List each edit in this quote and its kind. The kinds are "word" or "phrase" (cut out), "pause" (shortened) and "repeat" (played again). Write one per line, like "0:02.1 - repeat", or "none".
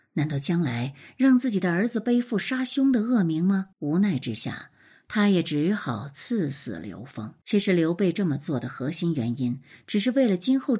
0:03.7 - pause
0:07.4 - pause